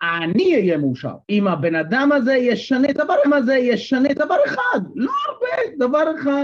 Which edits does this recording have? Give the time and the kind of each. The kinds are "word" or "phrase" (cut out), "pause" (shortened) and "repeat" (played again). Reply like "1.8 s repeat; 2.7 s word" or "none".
1.2 s pause; 3.2 s repeat